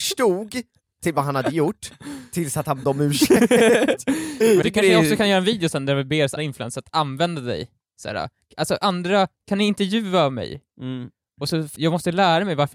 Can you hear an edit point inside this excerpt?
yes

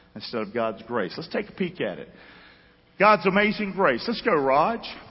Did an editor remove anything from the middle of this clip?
no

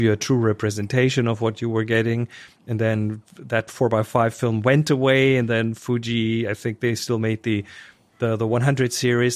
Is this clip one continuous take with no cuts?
yes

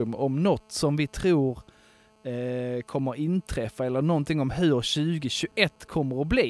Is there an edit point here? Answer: no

